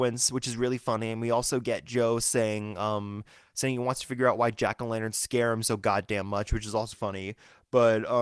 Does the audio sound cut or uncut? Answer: cut